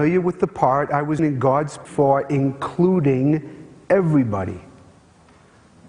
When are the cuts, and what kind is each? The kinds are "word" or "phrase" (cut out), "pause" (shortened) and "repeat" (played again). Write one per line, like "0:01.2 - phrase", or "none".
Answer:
0:01.2 - word
0:01.8 - word